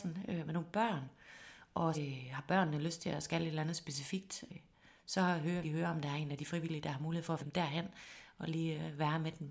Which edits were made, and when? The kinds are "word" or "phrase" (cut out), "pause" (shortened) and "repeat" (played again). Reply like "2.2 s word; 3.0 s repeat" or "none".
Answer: 1.9 s word; 4.5 s word; 5.6 s word; 7.4 s word

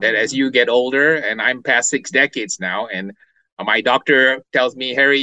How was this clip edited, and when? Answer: none

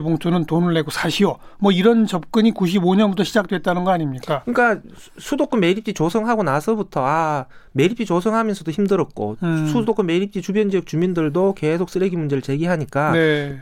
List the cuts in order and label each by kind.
none

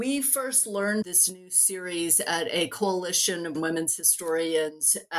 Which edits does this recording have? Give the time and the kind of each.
1.0 s word; 3.6 s word

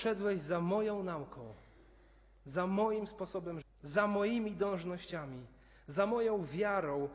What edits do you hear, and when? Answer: 3.6 s word

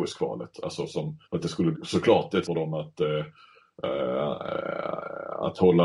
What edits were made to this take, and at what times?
1.2 s pause; 1.7 s word; 2.4 s word

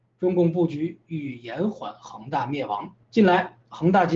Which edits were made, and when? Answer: 3.0 s pause

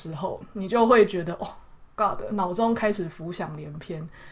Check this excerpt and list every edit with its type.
none

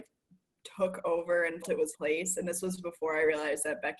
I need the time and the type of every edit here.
1.6 s word; 1.9 s word

